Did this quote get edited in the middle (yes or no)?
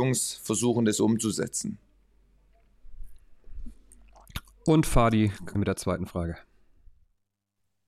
yes